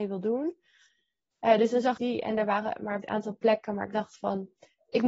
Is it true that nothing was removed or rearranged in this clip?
no; 2 cuts; at 2.0 s, 3.0 s

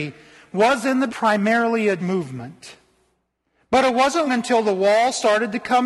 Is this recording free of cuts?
no; 3 cuts; at 1.1 s, 2.0 s, 4.3 s

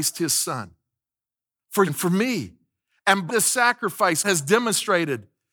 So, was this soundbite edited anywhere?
yes; 3 cuts; at 1.9 s, 3.3 s, 4.2 s

